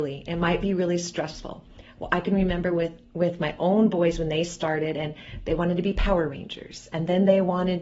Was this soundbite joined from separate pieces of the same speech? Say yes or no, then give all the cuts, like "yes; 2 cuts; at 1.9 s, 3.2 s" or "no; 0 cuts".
no; 0 cuts